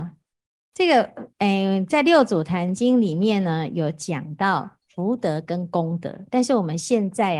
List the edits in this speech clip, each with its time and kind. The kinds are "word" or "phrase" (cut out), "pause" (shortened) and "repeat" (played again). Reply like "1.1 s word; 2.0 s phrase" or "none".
1.3 s pause; 4.8 s pause